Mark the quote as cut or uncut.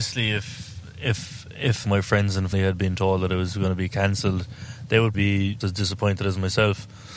cut